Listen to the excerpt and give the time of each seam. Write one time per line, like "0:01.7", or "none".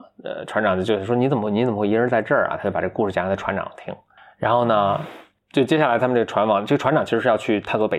none